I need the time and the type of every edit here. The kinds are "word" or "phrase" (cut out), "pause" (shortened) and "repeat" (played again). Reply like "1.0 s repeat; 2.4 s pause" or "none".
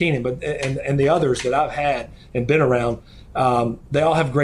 none